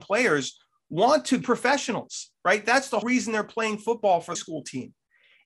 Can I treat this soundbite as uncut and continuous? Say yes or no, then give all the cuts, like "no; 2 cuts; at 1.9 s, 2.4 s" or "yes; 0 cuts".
no; 4 cuts; at 1.4 s, 2.4 s, 3.0 s, 4.3 s